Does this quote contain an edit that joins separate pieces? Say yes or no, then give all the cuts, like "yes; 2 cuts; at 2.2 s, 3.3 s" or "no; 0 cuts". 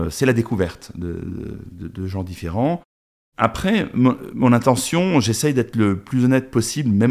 no; 0 cuts